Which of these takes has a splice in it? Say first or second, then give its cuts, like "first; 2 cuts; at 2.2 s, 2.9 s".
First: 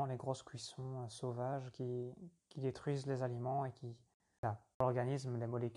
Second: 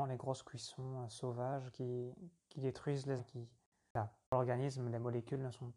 second; 1 cut; at 3.2 s